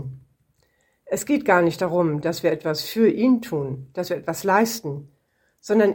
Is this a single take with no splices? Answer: yes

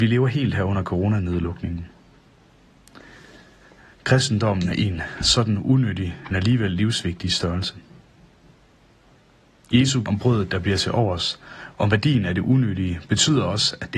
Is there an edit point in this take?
yes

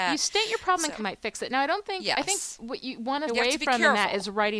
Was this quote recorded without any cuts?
no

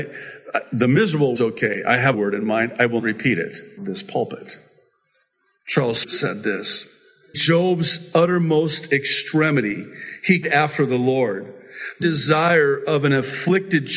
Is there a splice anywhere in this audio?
yes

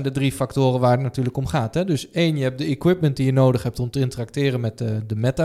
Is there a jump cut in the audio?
no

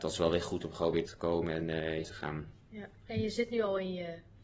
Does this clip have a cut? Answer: yes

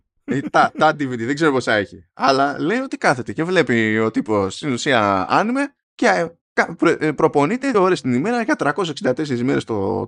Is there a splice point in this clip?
yes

